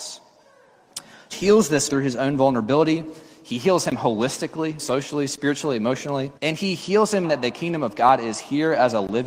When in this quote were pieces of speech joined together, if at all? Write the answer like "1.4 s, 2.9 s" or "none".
1.3 s, 1.9 s, 4.8 s, 6.4 s, 7.2 s